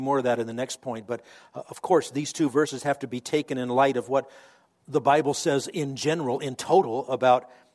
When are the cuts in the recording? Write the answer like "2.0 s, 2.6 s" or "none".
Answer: none